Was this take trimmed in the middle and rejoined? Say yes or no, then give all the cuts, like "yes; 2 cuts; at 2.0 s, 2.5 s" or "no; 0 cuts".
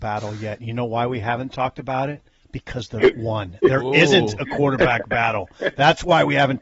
yes; 1 cut; at 3.1 s